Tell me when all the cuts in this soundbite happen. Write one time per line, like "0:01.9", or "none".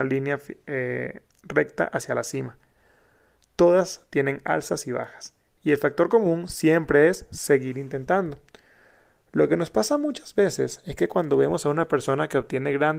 none

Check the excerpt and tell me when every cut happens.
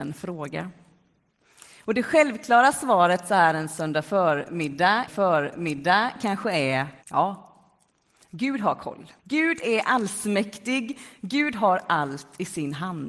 0:05.1
0:07.0
0:09.2

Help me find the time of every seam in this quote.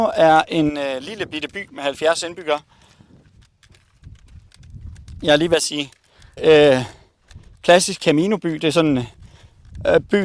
0:06.4

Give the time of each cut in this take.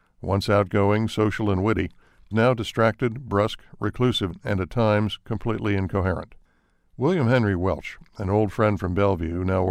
0:02.3

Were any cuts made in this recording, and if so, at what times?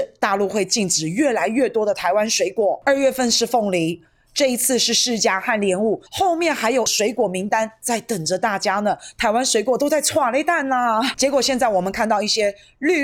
0:06.1

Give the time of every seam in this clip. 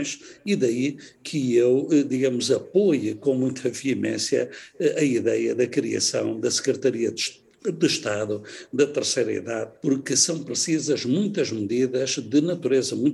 0:09.8

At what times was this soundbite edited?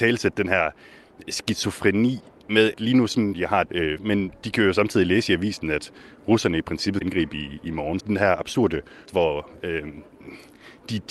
0:02.7
0:03.3
0:03.7
0:04.0
0:07.0
0:08.0
0:09.1

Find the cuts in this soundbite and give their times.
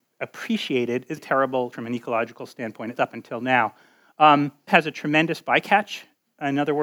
0:01.2
0:01.7
0:03.0
0:04.7

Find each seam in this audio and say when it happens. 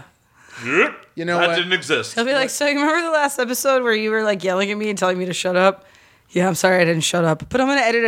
none

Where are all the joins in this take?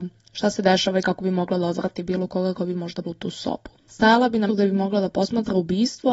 0:03.0
0:03.8
0:04.5

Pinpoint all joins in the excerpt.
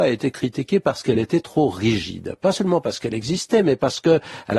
none

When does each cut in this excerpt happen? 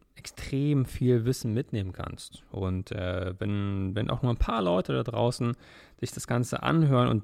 none

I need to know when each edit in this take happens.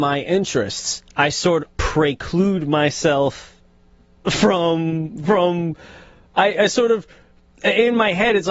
0:01.6

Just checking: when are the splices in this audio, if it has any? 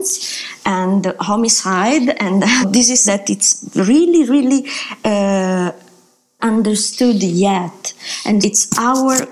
0:02.6
0:03.0
0:06.4
0:08.4

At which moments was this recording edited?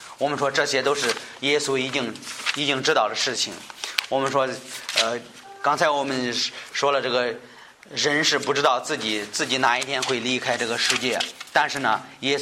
none

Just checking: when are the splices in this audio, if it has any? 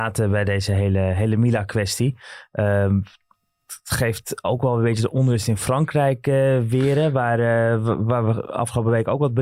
none

